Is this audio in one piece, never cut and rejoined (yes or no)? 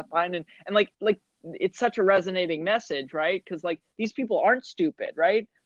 no